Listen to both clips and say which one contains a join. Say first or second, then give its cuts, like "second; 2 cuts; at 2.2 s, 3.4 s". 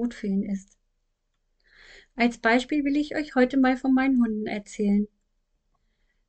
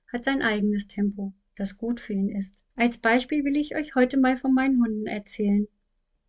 second; 1 cut; at 2.7 s